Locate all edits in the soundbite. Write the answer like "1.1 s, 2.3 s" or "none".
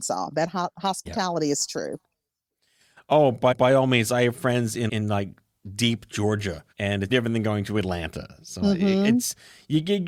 3.5 s, 4.9 s, 6.7 s, 7.1 s